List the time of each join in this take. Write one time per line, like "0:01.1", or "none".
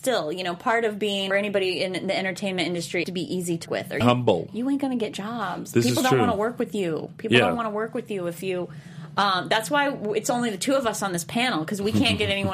0:01.3
0:03.0
0:03.7
0:04.0